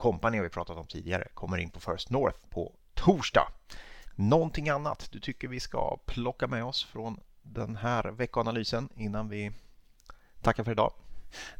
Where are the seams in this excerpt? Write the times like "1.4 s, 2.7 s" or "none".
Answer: 2.5 s